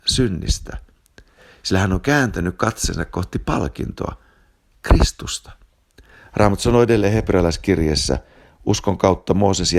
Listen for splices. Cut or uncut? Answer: uncut